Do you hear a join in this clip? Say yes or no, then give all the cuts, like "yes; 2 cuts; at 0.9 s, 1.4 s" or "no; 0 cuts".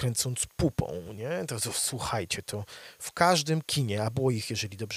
no; 0 cuts